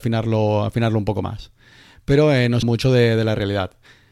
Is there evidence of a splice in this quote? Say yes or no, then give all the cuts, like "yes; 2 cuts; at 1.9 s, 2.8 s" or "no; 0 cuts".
yes; 1 cut; at 2.6 s